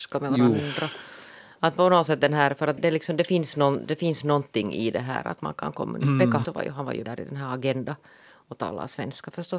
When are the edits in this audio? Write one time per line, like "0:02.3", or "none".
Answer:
0:02.8
0:06.4
0:07.0